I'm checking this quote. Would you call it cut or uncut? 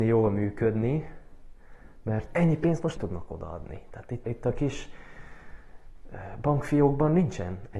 cut